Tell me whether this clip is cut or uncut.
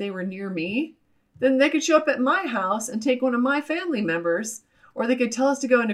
uncut